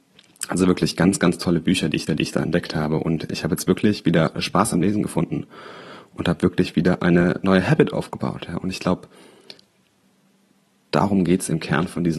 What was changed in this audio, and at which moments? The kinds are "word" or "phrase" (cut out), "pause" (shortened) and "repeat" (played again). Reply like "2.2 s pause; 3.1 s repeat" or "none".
2.1 s repeat